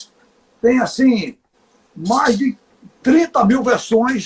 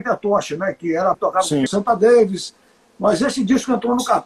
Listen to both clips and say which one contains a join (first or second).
second